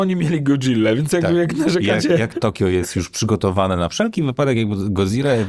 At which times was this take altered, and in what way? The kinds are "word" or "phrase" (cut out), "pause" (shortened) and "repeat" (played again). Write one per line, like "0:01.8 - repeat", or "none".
0:02.3 - phrase